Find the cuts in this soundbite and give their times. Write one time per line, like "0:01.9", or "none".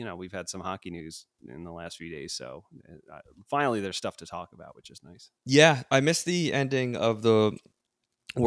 0:05.4

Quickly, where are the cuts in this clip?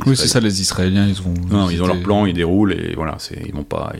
none

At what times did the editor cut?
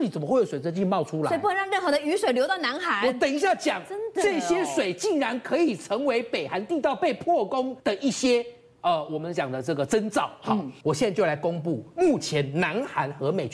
0:07.8

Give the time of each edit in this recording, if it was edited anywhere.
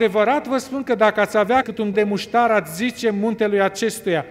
0:01.6
0:01.9

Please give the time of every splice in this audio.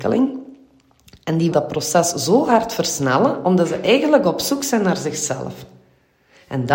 0:01.5

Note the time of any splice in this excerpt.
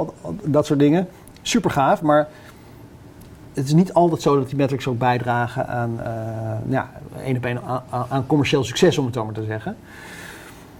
none

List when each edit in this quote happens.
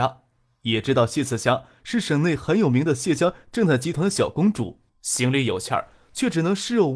0:04.9

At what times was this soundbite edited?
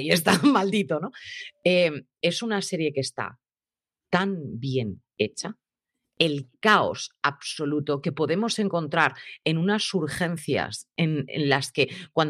none

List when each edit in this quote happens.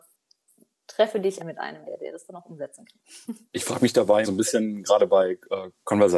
0:01.4
0:01.8
0:03.4
0:04.2

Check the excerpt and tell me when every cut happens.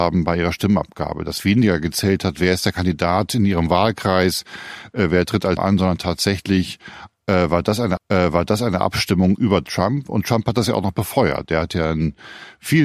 0:05.6
0:08.0

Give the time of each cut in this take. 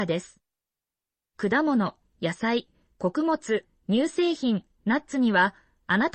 none

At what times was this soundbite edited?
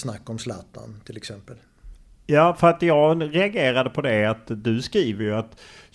none

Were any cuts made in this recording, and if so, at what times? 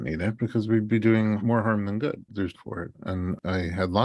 0:02.6

